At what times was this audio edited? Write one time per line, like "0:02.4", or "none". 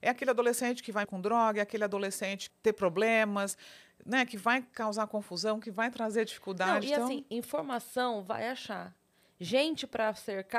0:01.0
0:02.5